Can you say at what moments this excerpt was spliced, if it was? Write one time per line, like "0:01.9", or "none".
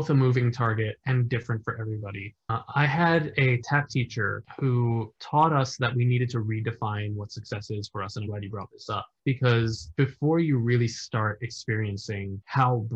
0:08.3

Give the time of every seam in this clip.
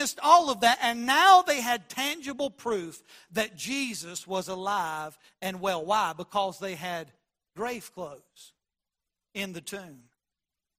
none

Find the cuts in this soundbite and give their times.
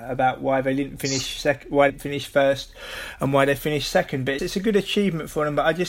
0:01.9
0:04.4

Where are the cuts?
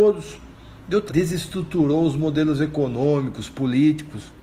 0:01.1

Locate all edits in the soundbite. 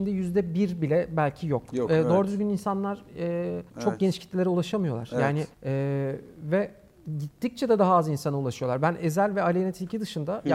0:03.7
0:05.5

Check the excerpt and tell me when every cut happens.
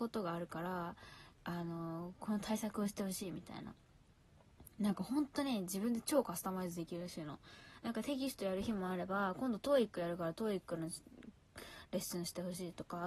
0:01.3

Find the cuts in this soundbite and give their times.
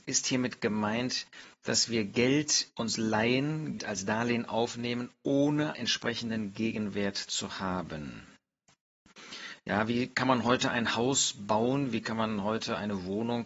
0:02.7
0:03.8
0:05.7

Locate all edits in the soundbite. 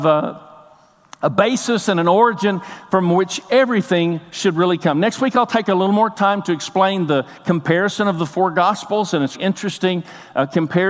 0:09.3

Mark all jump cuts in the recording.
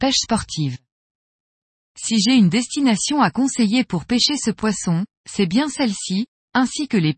none

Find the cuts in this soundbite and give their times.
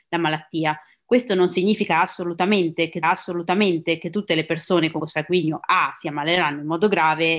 0:03.0
0:05.0

